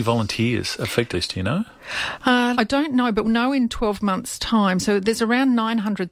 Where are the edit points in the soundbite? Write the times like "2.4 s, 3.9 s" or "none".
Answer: 1.1 s, 2.5 s, 3.2 s